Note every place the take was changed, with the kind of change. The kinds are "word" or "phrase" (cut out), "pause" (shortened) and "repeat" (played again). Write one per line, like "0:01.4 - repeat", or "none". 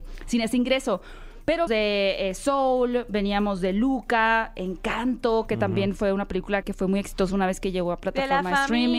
0:01.7 - word
0:06.6 - word